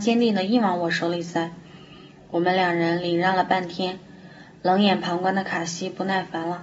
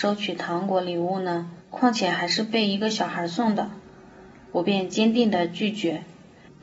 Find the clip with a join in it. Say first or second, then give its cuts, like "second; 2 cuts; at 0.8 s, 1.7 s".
second; 1 cut; at 1.6 s